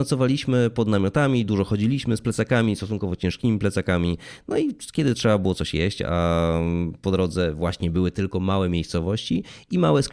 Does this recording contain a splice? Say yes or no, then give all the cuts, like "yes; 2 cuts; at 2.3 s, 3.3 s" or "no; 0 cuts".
no; 0 cuts